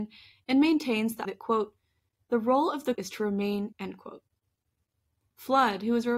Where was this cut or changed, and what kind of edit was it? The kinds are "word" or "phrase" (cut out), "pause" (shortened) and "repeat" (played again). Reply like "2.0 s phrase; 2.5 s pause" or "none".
1.2 s word; 2.9 s word; 3.7 s word